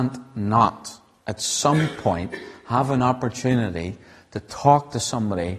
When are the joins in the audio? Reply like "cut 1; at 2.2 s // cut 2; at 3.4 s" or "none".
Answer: none